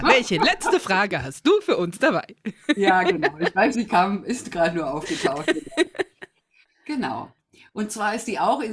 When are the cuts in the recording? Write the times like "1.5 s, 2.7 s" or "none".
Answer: 3.7 s